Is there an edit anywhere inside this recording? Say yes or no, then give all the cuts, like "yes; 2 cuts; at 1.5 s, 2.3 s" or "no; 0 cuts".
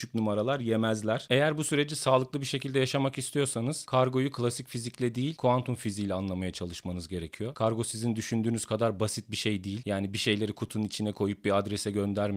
no; 0 cuts